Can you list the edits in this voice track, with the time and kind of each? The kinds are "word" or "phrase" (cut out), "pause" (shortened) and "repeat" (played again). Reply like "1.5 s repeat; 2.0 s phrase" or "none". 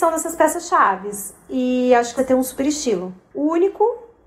2.2 s phrase